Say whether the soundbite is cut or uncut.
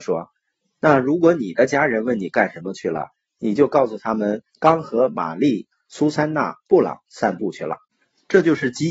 cut